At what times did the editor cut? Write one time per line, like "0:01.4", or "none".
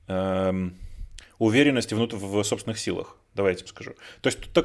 0:03.7

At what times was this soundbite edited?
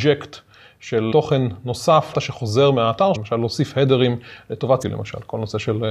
0:01.1
0:02.1
0:03.1
0:04.8

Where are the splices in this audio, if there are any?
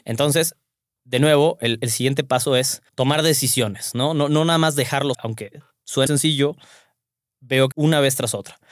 0:01.8
0:02.9
0:05.1
0:06.1
0:07.7

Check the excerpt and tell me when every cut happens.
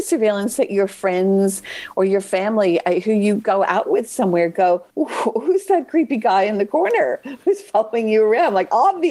0:04.9

